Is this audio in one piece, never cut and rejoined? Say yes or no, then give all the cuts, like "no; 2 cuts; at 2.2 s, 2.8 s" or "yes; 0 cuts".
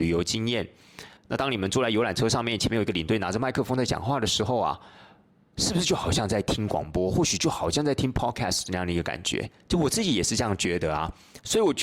no; 1 cut; at 1.2 s